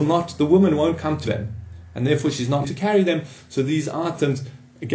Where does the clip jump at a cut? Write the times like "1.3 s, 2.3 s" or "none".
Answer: 1.3 s, 2.6 s